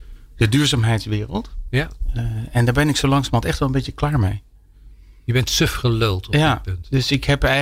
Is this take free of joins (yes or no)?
yes